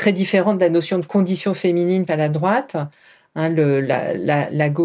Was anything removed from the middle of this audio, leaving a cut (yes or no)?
yes